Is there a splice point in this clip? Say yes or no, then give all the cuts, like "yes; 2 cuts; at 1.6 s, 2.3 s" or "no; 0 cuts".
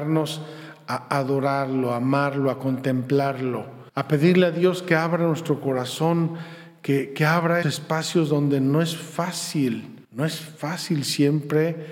yes; 3 cuts; at 3.9 s, 7.6 s, 10.0 s